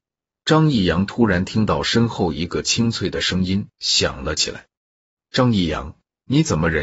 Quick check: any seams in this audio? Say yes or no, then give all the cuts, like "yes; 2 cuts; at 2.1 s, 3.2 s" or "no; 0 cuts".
yes; 1 cut; at 4.7 s